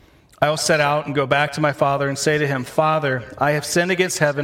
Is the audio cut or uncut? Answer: uncut